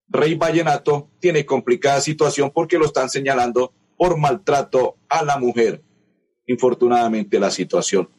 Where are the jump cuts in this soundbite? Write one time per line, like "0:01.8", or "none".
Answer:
none